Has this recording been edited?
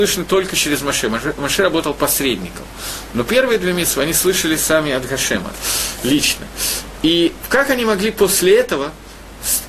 no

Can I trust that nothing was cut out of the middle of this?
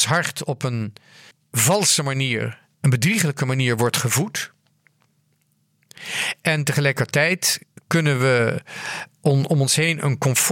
no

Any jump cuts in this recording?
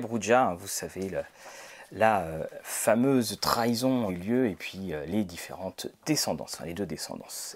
yes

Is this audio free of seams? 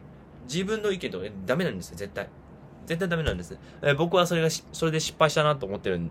yes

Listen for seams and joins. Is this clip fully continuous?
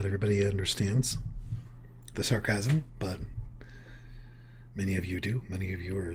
yes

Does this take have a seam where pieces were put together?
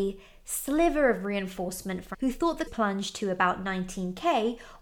yes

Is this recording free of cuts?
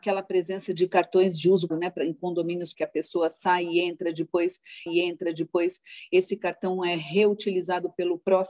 no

